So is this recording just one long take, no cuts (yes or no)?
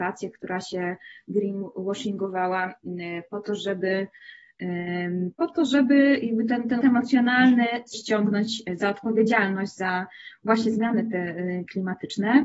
no